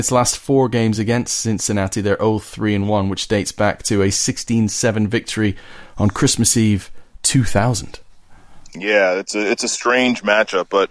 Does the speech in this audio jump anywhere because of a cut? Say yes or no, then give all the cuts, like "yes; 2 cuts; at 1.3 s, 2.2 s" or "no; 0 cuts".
no; 0 cuts